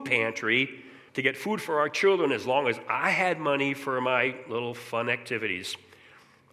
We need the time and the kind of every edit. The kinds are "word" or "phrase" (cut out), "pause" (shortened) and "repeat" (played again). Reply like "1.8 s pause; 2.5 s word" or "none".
1.1 s pause